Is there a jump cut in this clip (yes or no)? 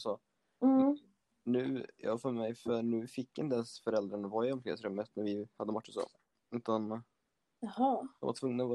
no